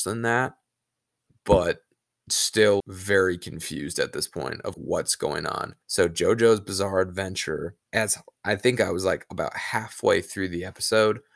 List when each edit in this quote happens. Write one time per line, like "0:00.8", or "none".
0:02.8
0:04.7
0:05.8
0:07.8